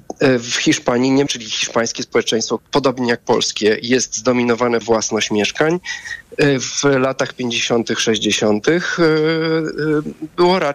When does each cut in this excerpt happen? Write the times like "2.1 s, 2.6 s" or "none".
1.3 s, 2.6 s, 4.8 s

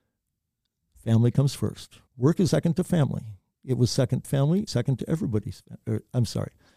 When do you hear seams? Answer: 2.1 s, 2.5 s, 4.2 s, 4.7 s

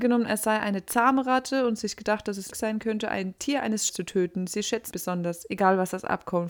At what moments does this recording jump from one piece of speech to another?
2.5 s, 3.4 s, 3.9 s, 4.9 s

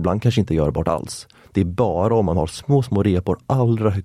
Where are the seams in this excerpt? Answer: none

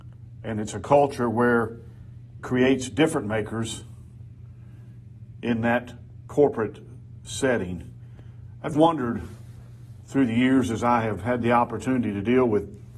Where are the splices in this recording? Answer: 2.4 s, 8.7 s

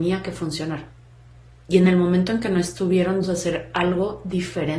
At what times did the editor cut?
3.2 s

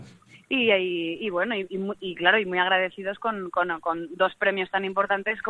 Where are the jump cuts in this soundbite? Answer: none

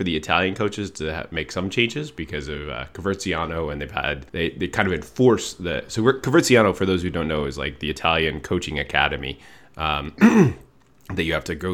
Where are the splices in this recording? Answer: 4.3 s

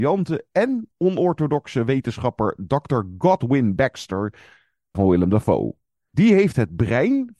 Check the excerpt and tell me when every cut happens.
4.9 s

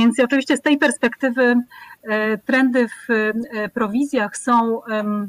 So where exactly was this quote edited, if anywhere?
none

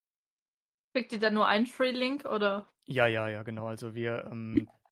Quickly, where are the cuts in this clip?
2.8 s

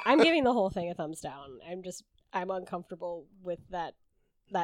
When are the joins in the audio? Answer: none

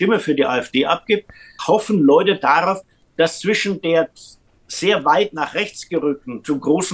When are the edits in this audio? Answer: 1.6 s

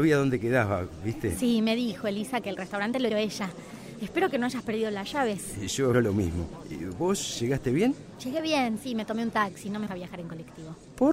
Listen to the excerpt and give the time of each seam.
2.4 s, 3.1 s, 5.9 s, 9.9 s

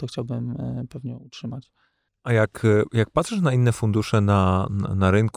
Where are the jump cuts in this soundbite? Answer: none

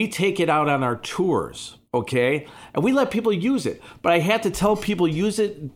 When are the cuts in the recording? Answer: 1.8 s

